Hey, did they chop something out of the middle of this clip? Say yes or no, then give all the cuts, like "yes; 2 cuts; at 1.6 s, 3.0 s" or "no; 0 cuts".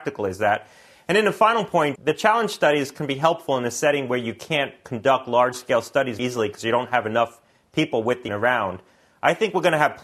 yes; 3 cuts; at 2.0 s, 6.2 s, 8.3 s